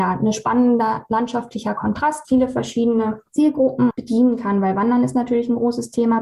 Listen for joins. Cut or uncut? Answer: cut